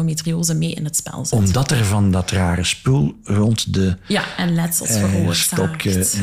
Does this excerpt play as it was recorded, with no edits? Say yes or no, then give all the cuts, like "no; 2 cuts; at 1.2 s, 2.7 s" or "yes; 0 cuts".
yes; 0 cuts